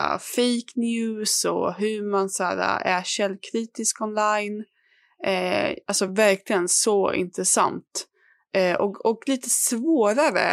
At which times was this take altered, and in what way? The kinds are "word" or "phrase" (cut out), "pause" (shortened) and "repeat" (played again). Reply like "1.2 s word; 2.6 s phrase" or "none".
none